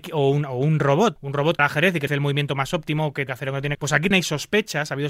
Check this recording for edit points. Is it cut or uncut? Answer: cut